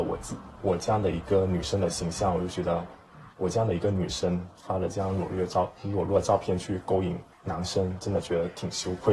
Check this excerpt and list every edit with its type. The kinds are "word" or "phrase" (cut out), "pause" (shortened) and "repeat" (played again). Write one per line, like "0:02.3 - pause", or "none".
0:07.3 - pause